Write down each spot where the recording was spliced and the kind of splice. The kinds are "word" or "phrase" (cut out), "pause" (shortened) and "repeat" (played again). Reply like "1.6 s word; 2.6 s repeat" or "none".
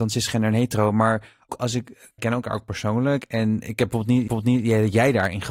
1.5 s word; 2.2 s phrase; 4.3 s repeat